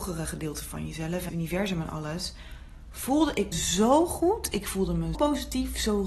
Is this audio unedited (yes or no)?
no